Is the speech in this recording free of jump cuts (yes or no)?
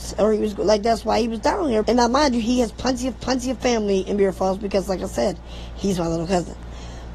no